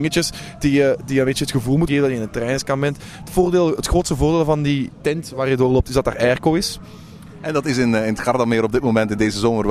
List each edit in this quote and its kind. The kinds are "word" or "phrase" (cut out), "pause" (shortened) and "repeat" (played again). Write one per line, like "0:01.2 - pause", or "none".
0:01.9 - word